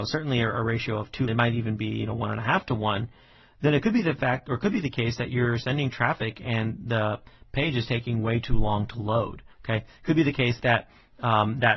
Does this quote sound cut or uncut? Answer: cut